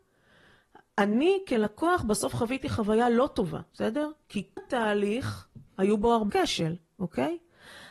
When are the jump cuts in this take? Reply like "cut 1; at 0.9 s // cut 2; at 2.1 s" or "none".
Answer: cut 1; at 3.7 s // cut 2; at 4.6 s // cut 3; at 5.7 s // cut 4; at 6.3 s